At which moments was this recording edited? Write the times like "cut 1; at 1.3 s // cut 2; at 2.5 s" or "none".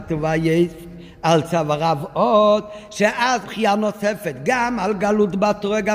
cut 1; at 3.4 s